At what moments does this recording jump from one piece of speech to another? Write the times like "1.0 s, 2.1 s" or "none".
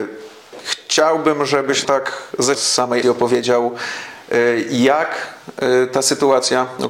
1.8 s, 2.5 s, 3.0 s